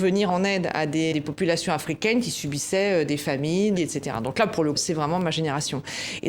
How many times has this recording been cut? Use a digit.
3